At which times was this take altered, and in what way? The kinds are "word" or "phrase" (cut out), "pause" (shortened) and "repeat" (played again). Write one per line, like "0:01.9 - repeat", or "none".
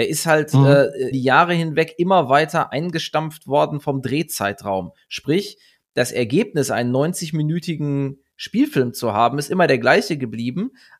0:01.1 - word